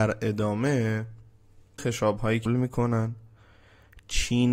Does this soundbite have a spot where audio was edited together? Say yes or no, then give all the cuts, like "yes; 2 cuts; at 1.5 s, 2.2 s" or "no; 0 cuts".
yes; 2 cuts; at 1.8 s, 2.5 s